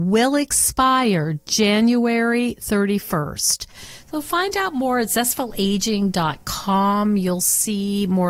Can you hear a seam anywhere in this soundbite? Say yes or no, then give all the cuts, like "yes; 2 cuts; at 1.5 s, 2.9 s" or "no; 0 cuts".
no; 0 cuts